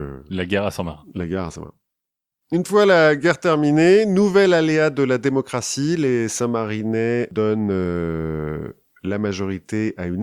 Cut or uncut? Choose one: uncut